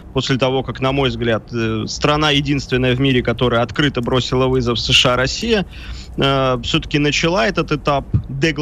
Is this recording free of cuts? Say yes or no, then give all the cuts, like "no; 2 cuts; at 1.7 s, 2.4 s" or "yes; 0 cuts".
yes; 0 cuts